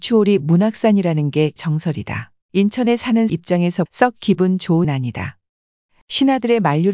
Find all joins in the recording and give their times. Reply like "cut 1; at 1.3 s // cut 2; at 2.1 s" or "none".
cut 1; at 1.6 s // cut 2; at 2.4 s // cut 3; at 3.3 s // cut 4; at 3.9 s // cut 5; at 4.8 s